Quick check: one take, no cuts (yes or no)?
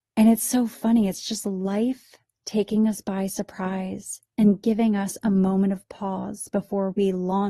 yes